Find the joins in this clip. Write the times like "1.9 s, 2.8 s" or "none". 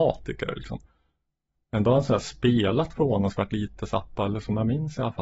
none